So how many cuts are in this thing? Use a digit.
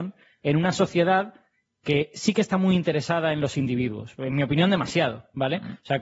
0